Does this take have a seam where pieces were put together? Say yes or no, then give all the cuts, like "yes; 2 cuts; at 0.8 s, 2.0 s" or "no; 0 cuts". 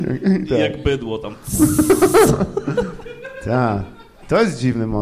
no; 0 cuts